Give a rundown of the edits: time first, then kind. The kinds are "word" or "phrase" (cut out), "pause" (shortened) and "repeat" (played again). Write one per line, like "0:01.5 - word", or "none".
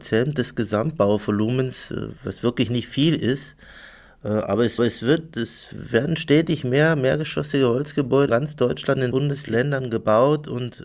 0:02.2 - pause
0:04.8 - repeat
0:08.3 - word
0:09.1 - word